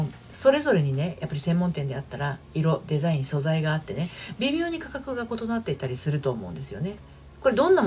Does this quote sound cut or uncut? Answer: cut